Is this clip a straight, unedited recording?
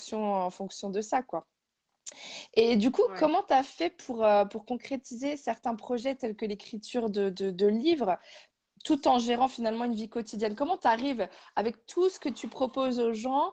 yes; 0 cuts

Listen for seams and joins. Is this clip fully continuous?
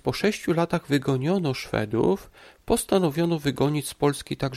yes; 0 cuts

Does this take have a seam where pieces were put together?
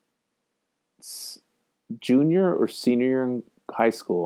no; 0 cuts

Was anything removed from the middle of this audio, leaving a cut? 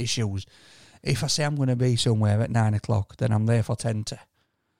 no; 0 cuts

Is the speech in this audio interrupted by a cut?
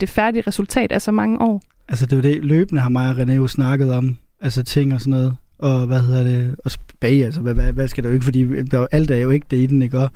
no; 0 cuts

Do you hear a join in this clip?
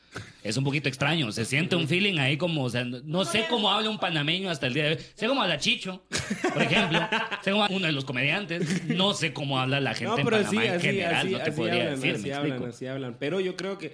yes; 1 cut; at 7.7 s

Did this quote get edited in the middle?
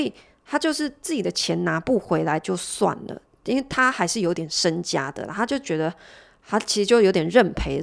no; 0 cuts

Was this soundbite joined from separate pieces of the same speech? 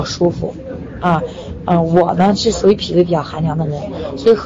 no; 0 cuts

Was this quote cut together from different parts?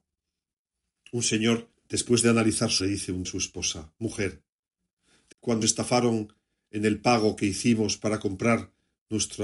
yes; 4 cuts; at 2.8 s, 3.2 s, 5.3 s, 5.6 s

